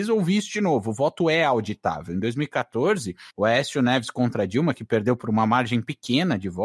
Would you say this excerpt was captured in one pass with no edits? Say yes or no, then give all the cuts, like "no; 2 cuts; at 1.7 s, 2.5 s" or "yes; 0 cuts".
no; 1 cut; at 3.3 s